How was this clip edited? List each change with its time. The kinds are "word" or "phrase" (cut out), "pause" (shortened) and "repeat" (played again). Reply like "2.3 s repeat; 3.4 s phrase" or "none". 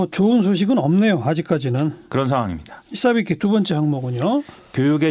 2.8 s pause